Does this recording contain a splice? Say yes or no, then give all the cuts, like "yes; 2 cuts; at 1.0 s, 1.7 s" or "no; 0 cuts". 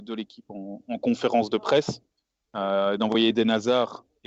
no; 0 cuts